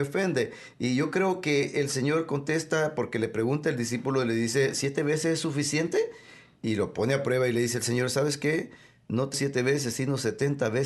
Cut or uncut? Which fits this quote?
cut